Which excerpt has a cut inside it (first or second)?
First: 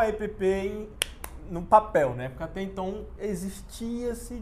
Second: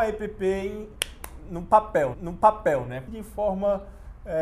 second